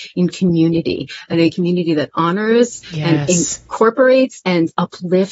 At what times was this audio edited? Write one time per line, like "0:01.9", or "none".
none

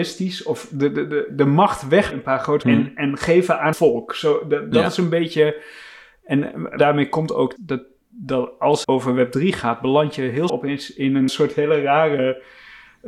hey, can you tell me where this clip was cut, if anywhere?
0:01.3
0:02.1
0:02.6
0:03.7
0:06.8
0:07.6
0:08.8
0:10.5
0:11.3

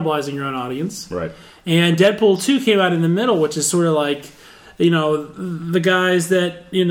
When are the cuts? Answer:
none

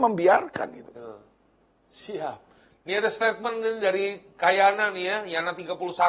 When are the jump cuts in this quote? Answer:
none

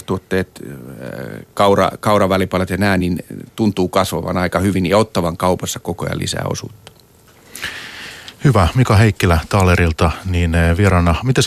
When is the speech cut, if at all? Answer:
none

